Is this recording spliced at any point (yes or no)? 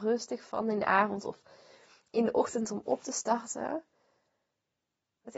yes